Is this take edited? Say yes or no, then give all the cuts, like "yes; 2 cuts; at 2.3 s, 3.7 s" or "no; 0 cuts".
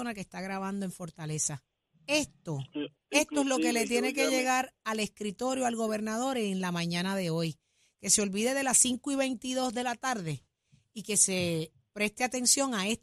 no; 0 cuts